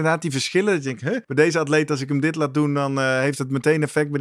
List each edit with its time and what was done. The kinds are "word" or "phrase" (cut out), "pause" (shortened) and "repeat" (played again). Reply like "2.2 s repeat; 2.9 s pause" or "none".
1.2 s pause